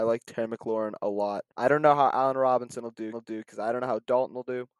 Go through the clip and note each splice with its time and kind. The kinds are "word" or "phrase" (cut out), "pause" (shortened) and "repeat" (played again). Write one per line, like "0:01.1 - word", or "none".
0:01.5 - pause
0:03.1 - repeat

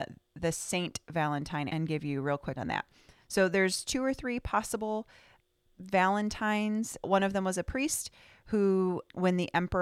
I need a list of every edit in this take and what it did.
0:01.7 - word
0:02.6 - word

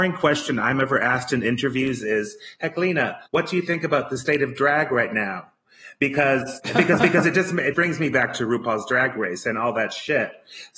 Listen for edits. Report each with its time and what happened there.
0:03.3 - pause
0:07.0 - repeat
0:07.7 - word

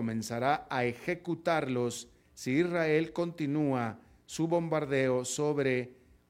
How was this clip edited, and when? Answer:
none

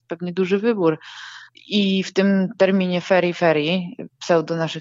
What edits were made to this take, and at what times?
none

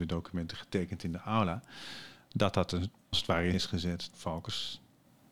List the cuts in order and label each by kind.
0:03.1 - word
0:03.5 - word
0:04.1 - word

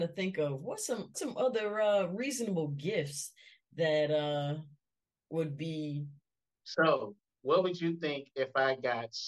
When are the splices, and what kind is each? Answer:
0:01.1 - word
0:06.6 - word

